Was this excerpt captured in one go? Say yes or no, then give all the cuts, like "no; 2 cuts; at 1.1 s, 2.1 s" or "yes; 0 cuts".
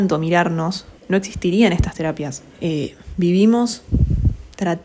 no; 2 cuts; at 1.0 s, 2.5 s